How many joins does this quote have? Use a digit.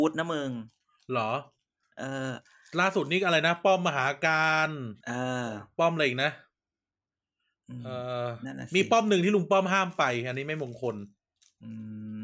1